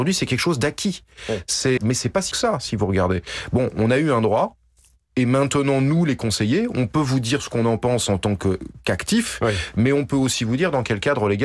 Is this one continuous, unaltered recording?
no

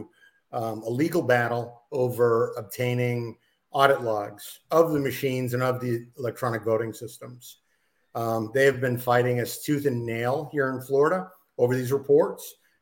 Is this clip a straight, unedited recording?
yes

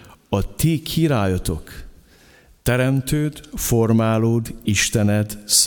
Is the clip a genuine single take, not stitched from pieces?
yes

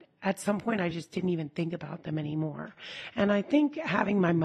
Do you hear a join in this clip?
no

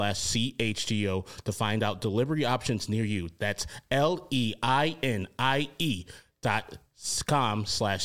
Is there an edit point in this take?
no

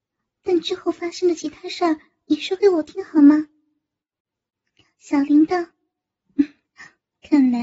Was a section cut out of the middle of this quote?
no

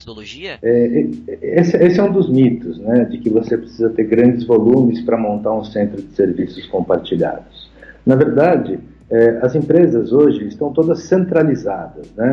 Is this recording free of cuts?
yes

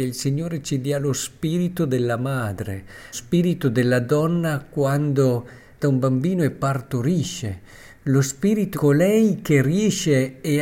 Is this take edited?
yes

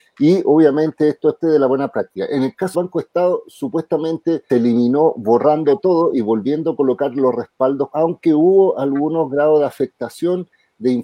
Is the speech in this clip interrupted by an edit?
yes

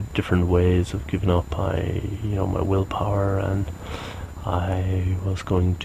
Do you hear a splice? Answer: no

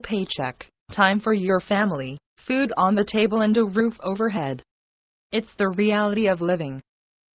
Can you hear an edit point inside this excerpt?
no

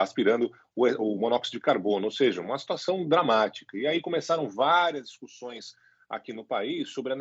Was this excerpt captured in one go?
yes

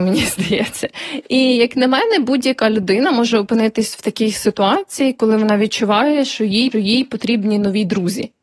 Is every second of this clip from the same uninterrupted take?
no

